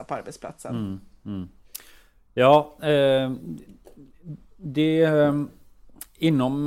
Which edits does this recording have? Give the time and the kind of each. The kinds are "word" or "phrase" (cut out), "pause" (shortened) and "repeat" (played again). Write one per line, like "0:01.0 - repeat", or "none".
none